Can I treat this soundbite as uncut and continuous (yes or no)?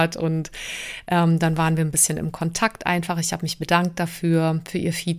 yes